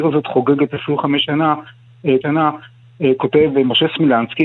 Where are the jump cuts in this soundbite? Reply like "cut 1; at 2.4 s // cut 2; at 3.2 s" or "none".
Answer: cut 1; at 2.2 s